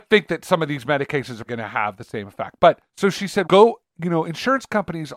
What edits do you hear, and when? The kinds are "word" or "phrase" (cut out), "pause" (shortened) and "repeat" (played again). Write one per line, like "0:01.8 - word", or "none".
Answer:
0:01.5 - word
0:02.9 - pause
0:03.4 - word